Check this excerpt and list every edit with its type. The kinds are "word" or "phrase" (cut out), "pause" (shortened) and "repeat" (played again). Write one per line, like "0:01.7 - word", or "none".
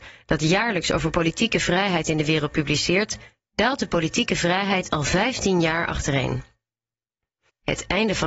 none